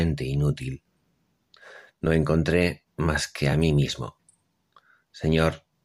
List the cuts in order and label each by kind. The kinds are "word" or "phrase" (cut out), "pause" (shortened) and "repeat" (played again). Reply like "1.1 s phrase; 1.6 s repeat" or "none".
none